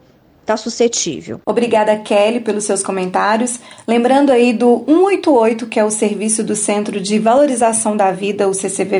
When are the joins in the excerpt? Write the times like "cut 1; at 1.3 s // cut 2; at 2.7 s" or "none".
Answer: none